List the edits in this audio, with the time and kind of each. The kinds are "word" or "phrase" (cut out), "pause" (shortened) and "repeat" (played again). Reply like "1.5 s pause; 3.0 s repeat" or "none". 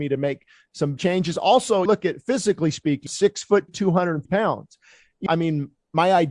1.0 s word; 1.9 s word; 3.1 s word; 3.7 s word; 4.3 s word; 5.3 s word

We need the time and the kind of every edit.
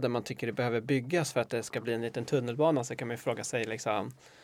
none

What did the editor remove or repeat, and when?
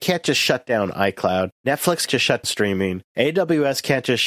2.1 s word; 2.4 s word

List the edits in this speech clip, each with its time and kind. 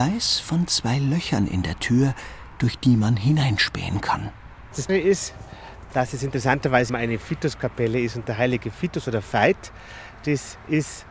4.9 s word; 6.9 s word

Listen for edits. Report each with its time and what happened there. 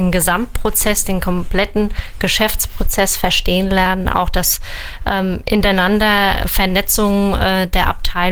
none

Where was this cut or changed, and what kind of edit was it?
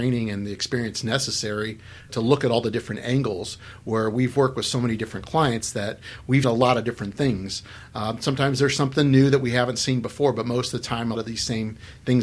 2.1 s word; 6.4 s word; 11.1 s word

